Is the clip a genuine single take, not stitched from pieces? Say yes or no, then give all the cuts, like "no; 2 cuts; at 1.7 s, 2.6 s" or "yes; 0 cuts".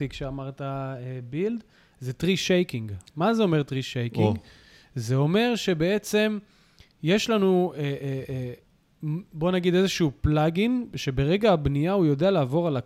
yes; 0 cuts